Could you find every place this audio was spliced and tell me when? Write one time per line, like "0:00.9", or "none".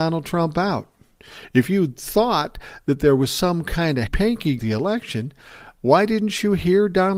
0:04.1
0:04.6